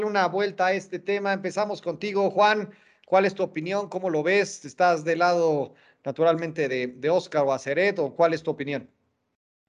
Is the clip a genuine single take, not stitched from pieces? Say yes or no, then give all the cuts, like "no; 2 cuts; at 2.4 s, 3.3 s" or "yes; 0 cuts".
yes; 0 cuts